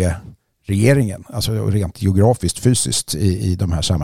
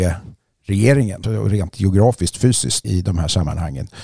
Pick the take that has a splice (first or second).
second